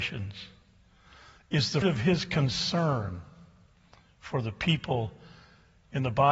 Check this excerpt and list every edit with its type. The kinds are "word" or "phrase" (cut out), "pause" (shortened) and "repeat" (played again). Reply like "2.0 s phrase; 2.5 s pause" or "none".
1.8 s word